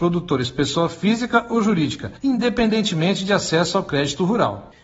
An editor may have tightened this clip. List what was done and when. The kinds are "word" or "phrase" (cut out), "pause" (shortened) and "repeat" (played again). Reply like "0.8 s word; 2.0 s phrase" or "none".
2.2 s pause